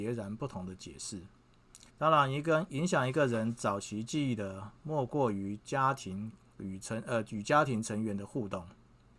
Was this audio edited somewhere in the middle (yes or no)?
yes